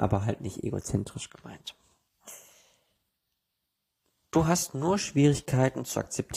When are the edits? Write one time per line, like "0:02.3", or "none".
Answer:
none